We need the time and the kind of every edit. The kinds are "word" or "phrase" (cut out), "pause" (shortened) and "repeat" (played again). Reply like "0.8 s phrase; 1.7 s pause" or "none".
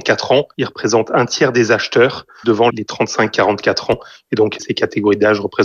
2.4 s word